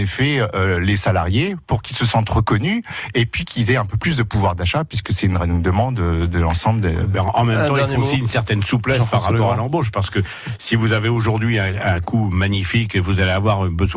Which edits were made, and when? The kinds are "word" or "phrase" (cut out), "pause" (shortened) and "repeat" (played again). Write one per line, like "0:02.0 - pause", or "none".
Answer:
none